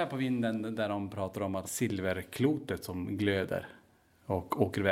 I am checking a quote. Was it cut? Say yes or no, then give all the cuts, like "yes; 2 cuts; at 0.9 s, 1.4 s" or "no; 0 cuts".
yes; 1 cut; at 1.6 s